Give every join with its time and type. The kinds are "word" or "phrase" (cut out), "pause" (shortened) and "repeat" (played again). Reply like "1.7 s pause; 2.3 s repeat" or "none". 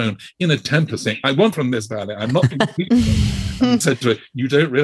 1.5 s phrase; 3.8 s word